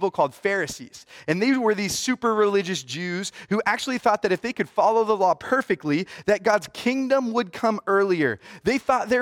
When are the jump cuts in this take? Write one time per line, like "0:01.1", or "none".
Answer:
none